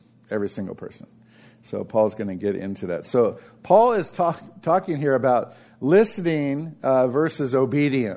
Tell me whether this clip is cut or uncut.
uncut